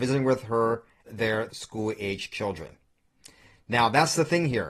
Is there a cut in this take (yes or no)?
yes